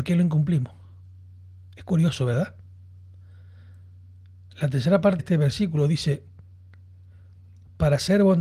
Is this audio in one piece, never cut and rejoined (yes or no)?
no